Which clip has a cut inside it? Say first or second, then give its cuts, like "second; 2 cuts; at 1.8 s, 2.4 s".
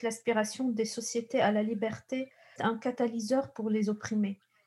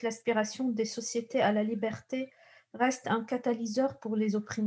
first; 1 cut; at 2.6 s